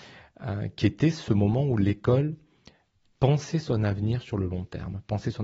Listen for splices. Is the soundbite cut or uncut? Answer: uncut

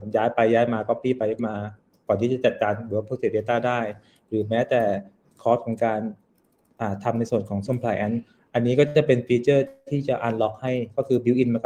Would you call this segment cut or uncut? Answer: cut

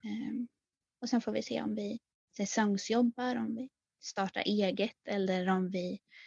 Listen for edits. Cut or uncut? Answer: uncut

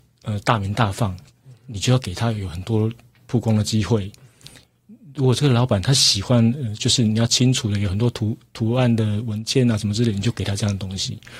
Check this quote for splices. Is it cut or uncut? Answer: uncut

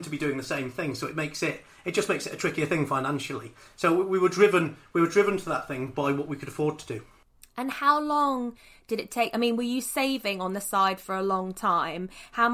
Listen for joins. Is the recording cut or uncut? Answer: uncut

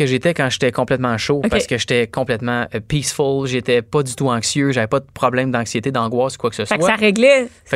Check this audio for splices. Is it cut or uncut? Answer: uncut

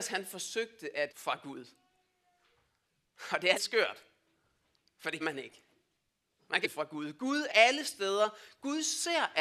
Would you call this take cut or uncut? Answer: cut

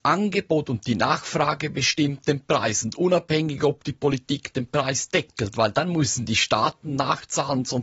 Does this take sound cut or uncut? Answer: uncut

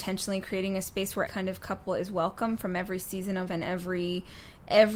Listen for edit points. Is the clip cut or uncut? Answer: cut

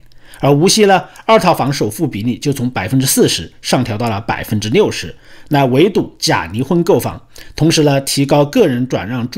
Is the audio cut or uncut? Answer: uncut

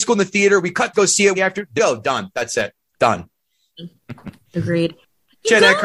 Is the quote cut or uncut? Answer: cut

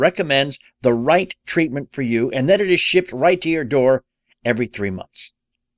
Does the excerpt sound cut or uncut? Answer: uncut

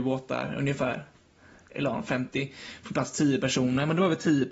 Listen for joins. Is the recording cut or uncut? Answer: uncut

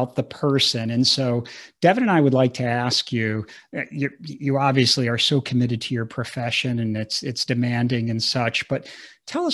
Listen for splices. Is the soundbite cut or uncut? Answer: uncut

